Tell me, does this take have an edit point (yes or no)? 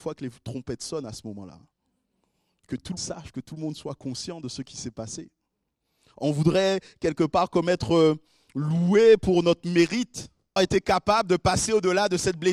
yes